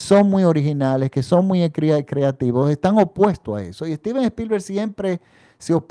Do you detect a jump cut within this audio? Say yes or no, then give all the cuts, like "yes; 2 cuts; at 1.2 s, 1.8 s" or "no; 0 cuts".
no; 0 cuts